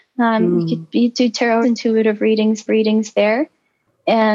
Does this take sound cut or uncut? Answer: cut